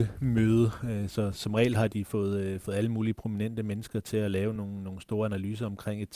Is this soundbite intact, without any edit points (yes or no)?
yes